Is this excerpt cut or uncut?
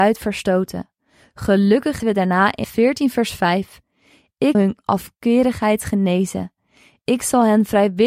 cut